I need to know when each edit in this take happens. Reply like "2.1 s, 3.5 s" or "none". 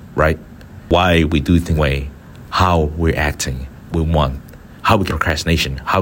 1.8 s, 3.9 s, 5.1 s